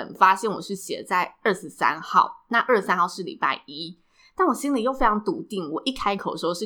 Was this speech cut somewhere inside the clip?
no; 0 cuts

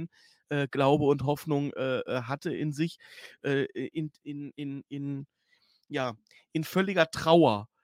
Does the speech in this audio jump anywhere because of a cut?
no; 0 cuts

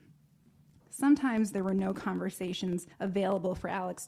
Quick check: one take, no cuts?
no; 1 cut; at 2.9 s

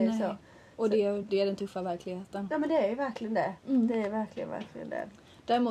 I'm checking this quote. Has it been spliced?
no; 0 cuts

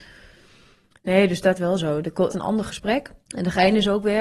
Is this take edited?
yes; 3 cuts; at 1.6 s, 2.3 s, 3.2 s

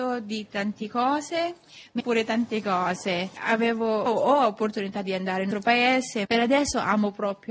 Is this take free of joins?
no; 4 cuts; at 2.0 s, 4.1 s, 5.5 s, 6.2 s

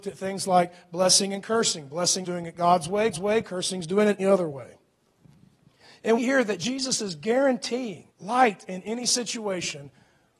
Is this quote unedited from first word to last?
no; 5 cuts; at 2.2 s, 3.1 s, 4.2 s, 6.2 s, 8.1 s

